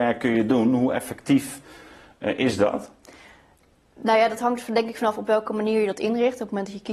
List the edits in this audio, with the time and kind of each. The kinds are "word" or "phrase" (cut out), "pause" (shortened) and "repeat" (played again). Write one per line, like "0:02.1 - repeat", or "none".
none